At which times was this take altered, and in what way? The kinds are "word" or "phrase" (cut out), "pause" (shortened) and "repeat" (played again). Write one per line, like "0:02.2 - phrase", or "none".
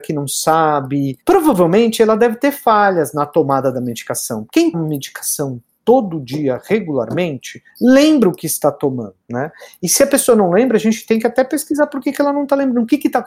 0:04.7 - word
0:07.7 - pause
0:09.2 - pause